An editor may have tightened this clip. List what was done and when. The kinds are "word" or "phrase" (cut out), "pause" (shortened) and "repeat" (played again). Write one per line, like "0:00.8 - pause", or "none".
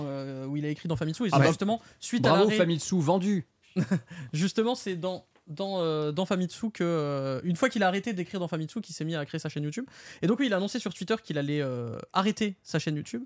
none